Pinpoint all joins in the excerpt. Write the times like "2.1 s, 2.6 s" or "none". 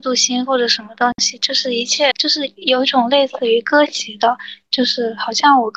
2.1 s